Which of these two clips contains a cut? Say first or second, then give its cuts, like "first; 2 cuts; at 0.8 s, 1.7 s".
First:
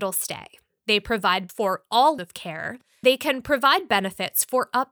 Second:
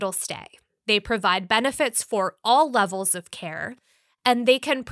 first; 3 cuts; at 1.5 s, 2.2 s, 3.0 s